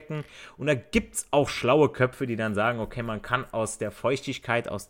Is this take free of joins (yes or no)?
yes